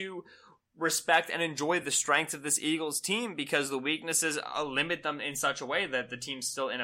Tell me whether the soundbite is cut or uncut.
uncut